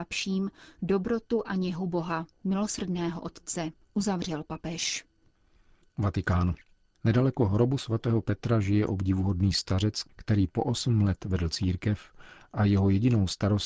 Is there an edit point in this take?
no; 0 cuts

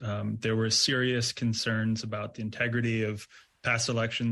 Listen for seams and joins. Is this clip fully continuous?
yes; 0 cuts

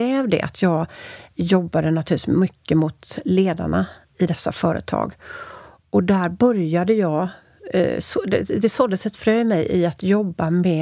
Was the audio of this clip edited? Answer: no; 0 cuts

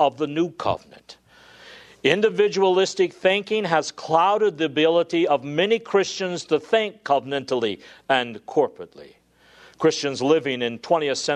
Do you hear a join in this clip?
no; 0 cuts

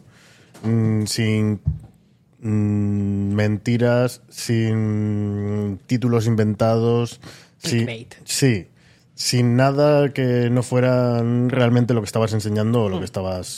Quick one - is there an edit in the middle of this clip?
no; 0 cuts

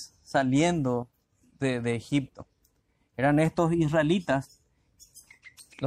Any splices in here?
no; 0 cuts

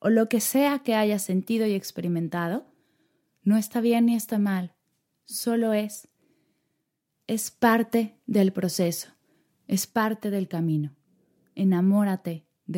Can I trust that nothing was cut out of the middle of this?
yes; 0 cuts

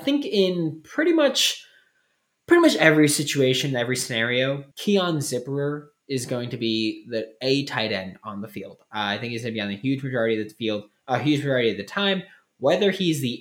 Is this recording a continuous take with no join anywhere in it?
no; 1 cut; at 4.7 s

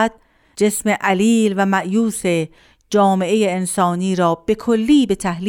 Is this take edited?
no; 0 cuts

